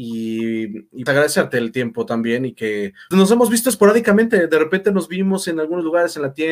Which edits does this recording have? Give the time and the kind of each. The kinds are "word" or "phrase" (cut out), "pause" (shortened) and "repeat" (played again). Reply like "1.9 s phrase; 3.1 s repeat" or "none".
1.1 s word; 3.1 s word